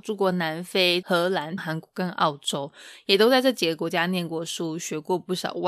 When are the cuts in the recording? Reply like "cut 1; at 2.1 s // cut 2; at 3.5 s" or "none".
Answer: cut 1; at 1.6 s